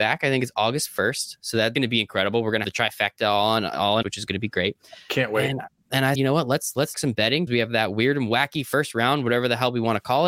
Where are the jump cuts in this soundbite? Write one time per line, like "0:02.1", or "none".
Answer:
0:01.7
0:02.6
0:04.0
0:06.1
0:06.9
0:07.5